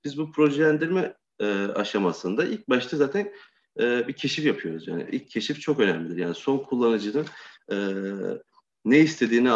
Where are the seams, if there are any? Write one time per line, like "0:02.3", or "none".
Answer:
none